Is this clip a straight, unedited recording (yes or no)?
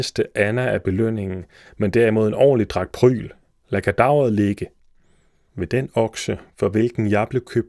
yes